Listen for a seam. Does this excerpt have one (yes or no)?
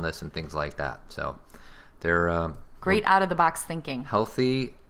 no